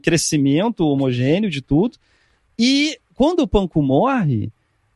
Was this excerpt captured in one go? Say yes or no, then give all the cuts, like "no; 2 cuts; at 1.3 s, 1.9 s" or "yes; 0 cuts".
no; 1 cut; at 3.0 s